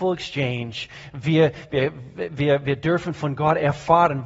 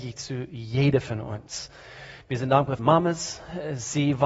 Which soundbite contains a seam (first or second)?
second